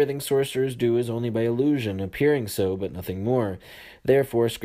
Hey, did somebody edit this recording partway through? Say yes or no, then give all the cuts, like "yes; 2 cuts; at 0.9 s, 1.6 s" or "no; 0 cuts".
no; 0 cuts